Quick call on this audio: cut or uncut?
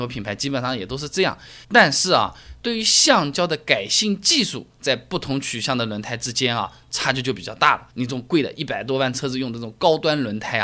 cut